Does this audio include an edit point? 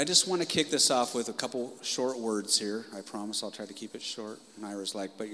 no; 0 cuts

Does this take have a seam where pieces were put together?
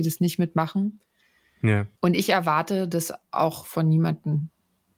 yes; 1 cut; at 2.0 s

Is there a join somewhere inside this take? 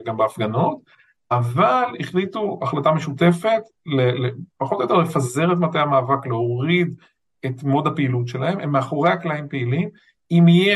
no; 0 cuts

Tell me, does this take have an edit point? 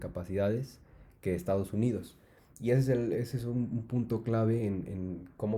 no; 0 cuts

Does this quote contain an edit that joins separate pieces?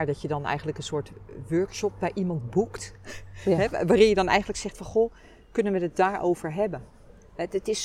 no; 0 cuts

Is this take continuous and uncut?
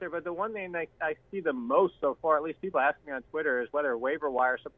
yes; 0 cuts

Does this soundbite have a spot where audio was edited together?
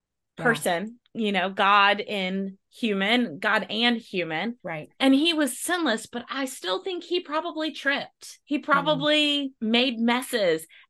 yes; 4 cuts; at 2.6 s, 4.6 s, 8.4 s, 9.6 s

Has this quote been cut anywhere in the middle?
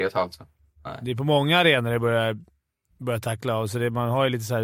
no; 0 cuts

